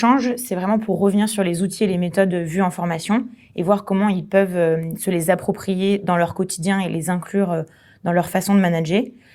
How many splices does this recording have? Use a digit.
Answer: 0